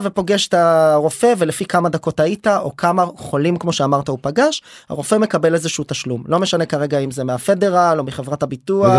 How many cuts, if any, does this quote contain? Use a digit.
0